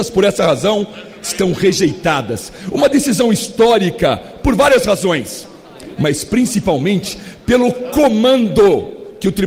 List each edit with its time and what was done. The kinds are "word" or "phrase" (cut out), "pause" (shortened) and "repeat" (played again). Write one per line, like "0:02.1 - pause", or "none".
none